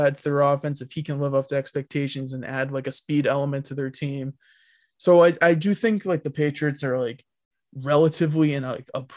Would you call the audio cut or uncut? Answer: uncut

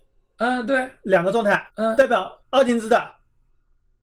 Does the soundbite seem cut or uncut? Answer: cut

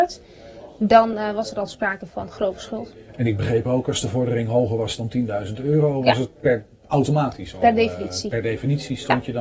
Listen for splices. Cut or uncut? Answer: uncut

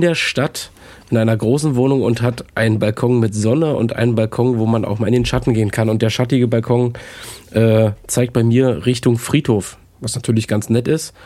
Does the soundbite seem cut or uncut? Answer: uncut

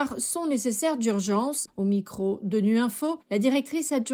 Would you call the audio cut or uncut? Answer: uncut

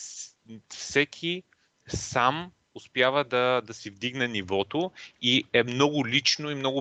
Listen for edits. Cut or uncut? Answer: uncut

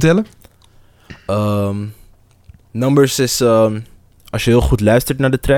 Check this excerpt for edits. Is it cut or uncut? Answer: uncut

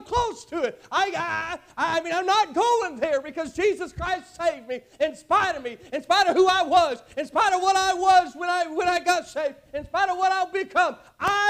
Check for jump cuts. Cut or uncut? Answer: uncut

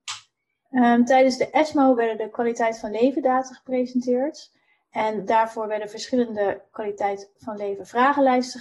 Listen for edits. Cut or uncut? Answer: uncut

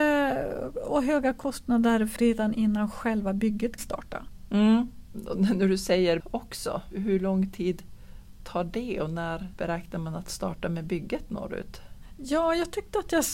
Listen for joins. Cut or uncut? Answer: cut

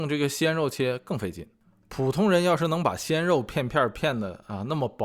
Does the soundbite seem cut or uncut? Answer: uncut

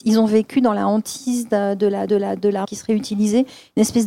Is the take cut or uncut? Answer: cut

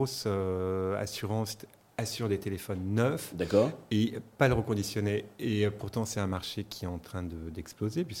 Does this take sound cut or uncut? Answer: uncut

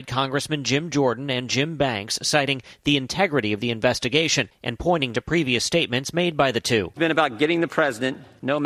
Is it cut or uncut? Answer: cut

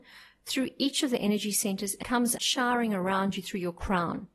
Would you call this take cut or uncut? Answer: cut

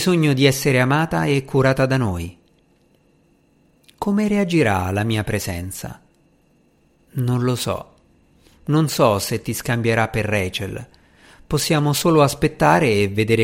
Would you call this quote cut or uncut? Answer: uncut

